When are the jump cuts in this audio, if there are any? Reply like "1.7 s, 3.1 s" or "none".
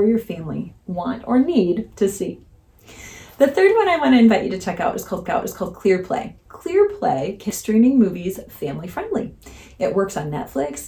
5.3 s, 6.4 s, 7.5 s